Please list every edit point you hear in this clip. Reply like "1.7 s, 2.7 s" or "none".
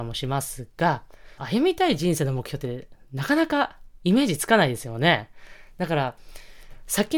1.4 s